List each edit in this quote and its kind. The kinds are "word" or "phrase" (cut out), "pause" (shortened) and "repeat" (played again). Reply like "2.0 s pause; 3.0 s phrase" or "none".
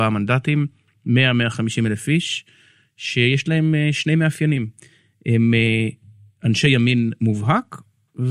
none